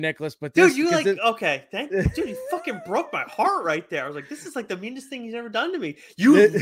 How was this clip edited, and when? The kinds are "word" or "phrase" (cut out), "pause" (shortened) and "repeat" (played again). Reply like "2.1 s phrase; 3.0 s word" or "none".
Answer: none